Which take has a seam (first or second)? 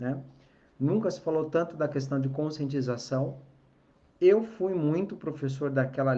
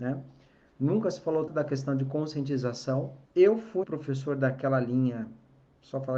second